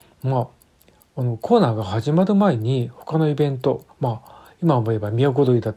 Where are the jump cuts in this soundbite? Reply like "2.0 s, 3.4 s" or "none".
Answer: 3.9 s